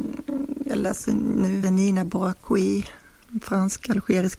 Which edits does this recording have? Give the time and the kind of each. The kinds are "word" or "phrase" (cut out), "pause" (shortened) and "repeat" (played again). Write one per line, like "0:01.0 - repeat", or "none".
0:01.6 - word